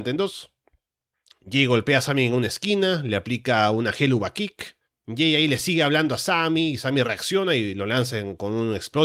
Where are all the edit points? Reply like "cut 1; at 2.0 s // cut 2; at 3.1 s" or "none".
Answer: cut 1; at 4.8 s

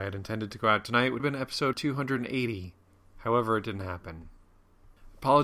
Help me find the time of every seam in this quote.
cut 1; at 1.2 s // cut 2; at 1.7 s

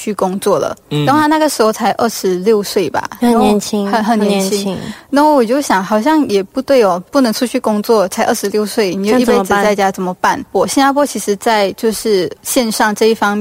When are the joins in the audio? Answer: cut 1; at 12.4 s

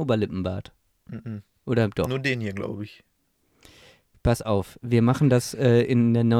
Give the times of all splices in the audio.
none

